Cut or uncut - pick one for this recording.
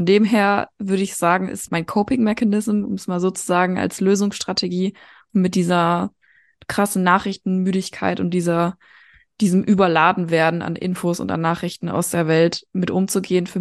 cut